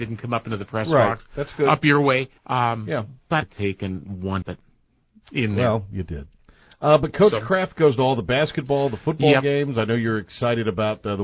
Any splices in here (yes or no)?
yes